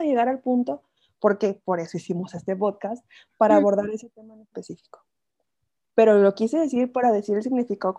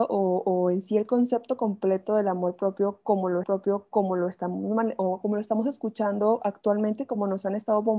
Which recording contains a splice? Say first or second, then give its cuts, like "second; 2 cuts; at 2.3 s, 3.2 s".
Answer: second; 1 cut; at 3.4 s